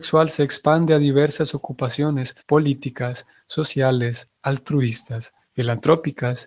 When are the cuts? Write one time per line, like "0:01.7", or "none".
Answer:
0:02.4
0:05.4